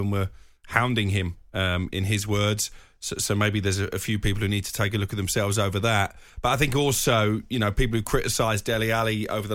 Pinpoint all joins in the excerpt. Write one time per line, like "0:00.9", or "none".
0:06.3